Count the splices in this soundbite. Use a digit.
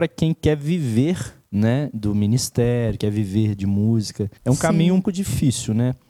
4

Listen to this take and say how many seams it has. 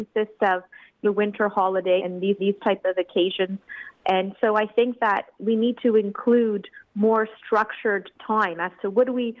4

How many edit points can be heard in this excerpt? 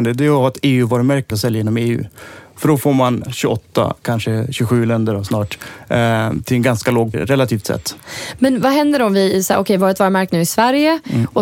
4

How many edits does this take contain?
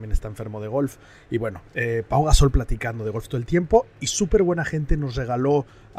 1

